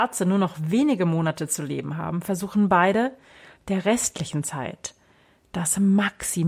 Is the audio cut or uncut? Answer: uncut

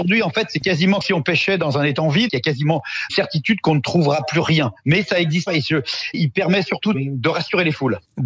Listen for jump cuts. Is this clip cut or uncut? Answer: cut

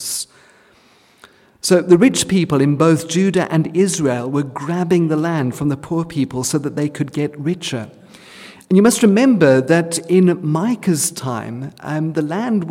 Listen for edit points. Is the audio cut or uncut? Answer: uncut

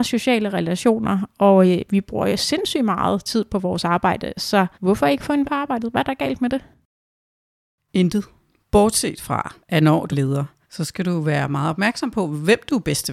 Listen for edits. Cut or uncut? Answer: cut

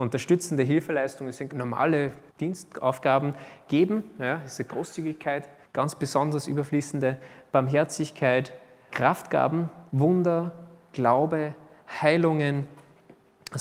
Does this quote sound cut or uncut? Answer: cut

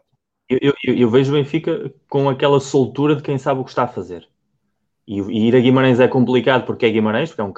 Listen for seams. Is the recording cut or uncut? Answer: uncut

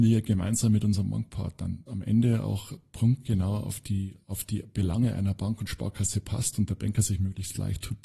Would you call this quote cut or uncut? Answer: cut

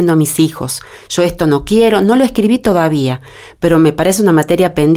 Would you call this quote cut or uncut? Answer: uncut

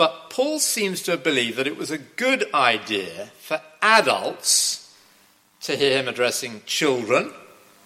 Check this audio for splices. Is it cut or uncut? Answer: uncut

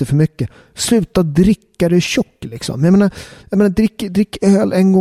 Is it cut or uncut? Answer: uncut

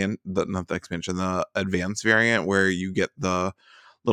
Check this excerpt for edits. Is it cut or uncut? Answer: uncut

